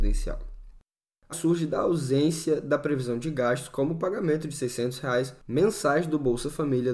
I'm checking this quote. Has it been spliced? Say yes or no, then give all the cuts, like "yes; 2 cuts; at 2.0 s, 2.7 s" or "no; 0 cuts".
yes; 1 cut; at 1.3 s